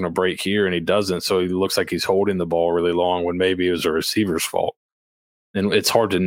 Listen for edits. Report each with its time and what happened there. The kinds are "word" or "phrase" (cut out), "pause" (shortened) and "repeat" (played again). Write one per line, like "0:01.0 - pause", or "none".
none